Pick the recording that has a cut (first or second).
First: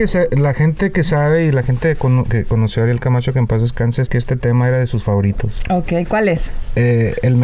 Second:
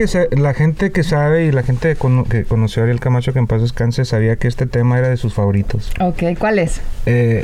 first